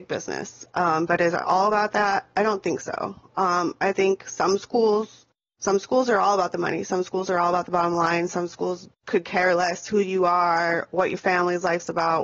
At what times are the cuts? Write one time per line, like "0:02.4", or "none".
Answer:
0:05.5
0:08.9